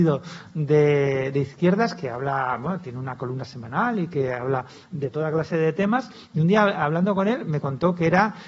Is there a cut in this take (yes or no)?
no